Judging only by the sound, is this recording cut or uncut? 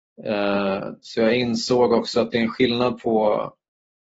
uncut